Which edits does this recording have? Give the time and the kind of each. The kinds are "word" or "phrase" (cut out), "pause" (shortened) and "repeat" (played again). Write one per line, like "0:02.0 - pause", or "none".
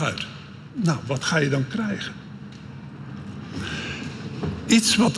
none

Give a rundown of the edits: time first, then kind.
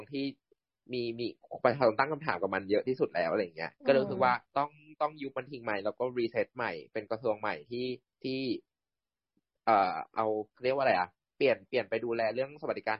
0:03.8 - pause
0:04.5 - pause
0:08.1 - pause
0:10.5 - pause

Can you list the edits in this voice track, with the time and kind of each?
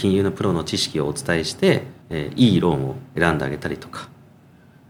0:02.0 - pause

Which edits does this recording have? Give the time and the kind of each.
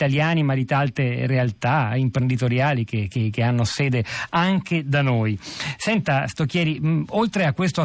none

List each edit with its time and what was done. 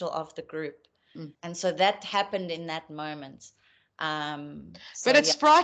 0:01.3 - pause

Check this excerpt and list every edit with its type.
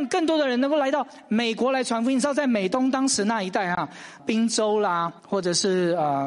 0:04.2 - word
0:05.2 - pause

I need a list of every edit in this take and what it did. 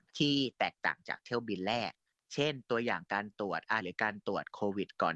0:03.8 - word

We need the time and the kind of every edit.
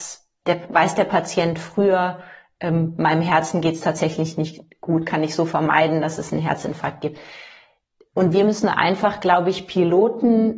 none

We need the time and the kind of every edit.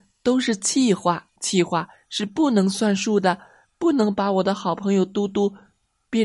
0:01.4 - pause

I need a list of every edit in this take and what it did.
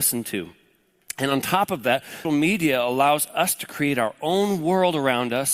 0:02.2 - word

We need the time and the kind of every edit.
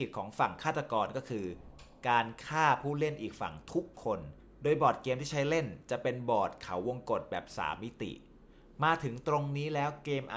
none

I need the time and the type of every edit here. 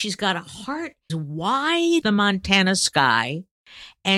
0:01.1 - word
0:02.0 - word

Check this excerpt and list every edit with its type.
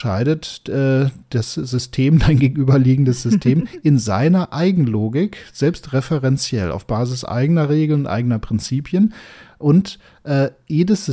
none

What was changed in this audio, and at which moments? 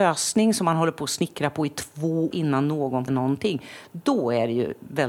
0:02.3 - word
0:03.1 - word

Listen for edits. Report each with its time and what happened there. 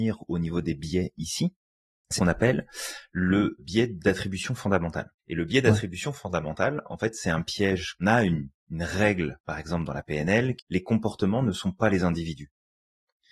0:02.2 - word
0:03.6 - word
0:05.2 - pause
0:08.0 - phrase
0:08.6 - pause
0:10.6 - phrase

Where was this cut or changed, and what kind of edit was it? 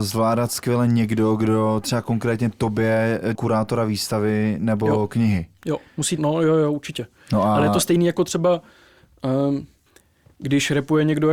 0:03.3 - word
0:06.2 - word
0:09.9 - pause

